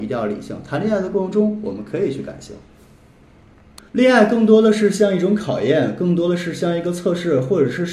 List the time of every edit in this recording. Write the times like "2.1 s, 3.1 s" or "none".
3.9 s